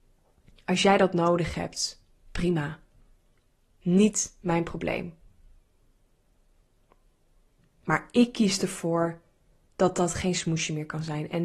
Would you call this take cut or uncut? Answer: uncut